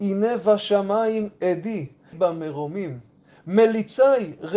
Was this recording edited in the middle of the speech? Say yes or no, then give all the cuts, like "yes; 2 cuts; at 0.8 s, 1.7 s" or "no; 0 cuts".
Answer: yes; 1 cut; at 2.1 s